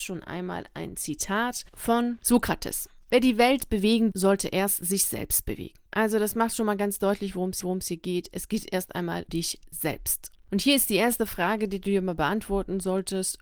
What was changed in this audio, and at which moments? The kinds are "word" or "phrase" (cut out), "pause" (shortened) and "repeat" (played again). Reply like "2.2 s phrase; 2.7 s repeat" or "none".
4.1 s word; 5.9 s pause; 7.6 s repeat; 9.3 s word